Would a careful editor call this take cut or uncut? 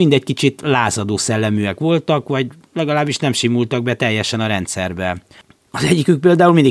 uncut